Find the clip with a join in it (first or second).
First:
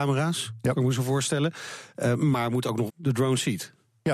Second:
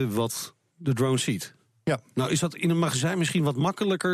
first